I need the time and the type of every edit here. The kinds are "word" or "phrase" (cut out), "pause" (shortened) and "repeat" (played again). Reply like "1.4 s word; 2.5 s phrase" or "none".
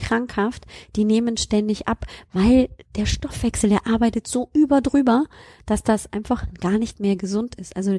none